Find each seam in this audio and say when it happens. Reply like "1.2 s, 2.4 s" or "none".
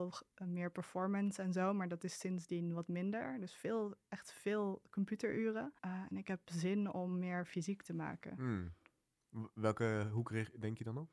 5.8 s